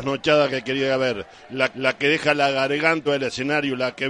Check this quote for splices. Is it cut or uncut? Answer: cut